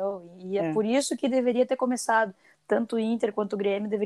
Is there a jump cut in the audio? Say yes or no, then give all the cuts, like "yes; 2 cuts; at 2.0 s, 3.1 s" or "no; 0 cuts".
no; 0 cuts